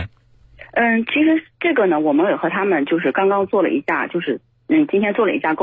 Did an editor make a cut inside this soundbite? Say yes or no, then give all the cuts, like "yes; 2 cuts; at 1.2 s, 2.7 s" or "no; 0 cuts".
no; 0 cuts